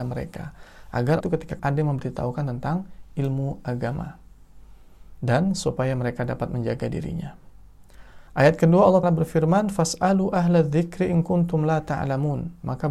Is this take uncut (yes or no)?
no